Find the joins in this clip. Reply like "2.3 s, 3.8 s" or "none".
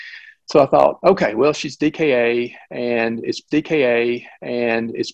3.5 s